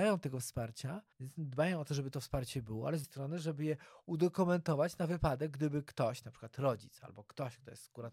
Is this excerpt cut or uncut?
cut